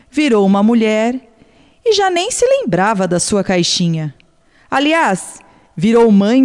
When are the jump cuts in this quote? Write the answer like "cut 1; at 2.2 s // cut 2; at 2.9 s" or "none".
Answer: none